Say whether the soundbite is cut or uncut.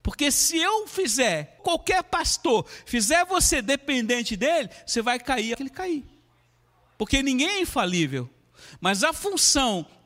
cut